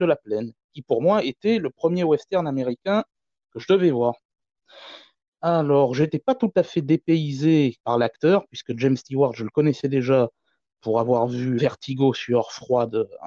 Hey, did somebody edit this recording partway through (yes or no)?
yes